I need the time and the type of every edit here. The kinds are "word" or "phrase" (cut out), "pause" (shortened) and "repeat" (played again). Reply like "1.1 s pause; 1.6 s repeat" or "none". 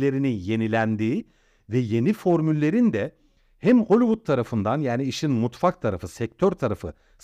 none